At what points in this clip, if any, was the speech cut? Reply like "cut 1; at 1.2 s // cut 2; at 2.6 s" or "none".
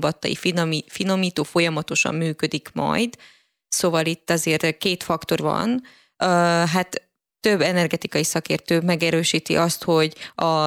cut 1; at 5.4 s // cut 2; at 7.3 s